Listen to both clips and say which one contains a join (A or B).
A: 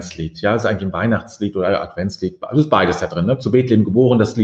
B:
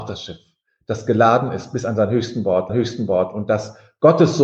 B